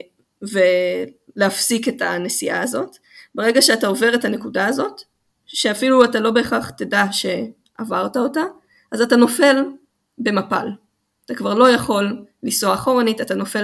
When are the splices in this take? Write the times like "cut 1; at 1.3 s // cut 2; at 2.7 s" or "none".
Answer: none

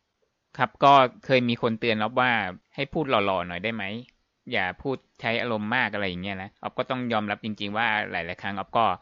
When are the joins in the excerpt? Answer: cut 1; at 6.5 s

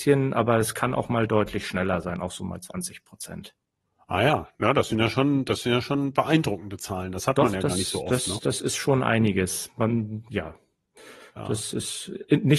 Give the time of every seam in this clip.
none

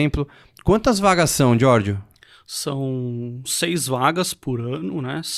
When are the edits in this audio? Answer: cut 1; at 3.5 s

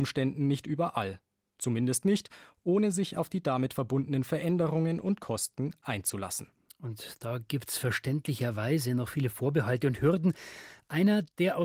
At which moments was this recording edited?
none

